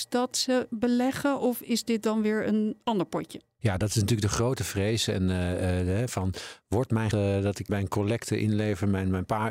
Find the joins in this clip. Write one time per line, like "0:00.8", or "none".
0:07.1
0:07.7